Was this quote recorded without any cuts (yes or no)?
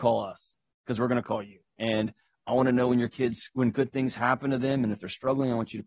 yes